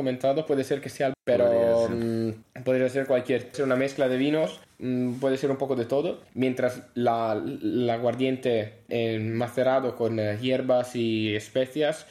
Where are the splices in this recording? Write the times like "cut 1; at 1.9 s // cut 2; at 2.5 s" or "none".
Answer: cut 1; at 1.1 s // cut 2; at 3.5 s // cut 3; at 8.9 s